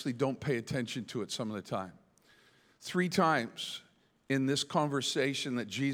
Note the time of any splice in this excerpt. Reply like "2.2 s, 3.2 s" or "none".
none